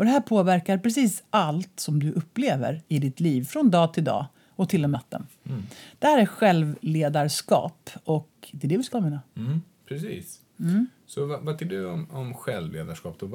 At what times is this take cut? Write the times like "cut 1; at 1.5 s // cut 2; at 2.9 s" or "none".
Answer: cut 1; at 4.9 s // cut 2; at 8.9 s // cut 3; at 11.6 s